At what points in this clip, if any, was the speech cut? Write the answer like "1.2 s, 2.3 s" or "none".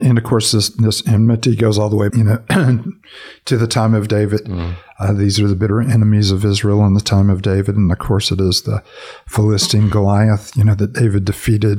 2.1 s